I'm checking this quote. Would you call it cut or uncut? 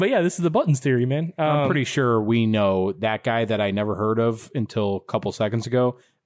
uncut